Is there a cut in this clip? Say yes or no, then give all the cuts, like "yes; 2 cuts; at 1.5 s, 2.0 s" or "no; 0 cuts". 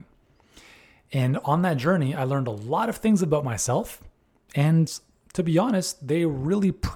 no; 0 cuts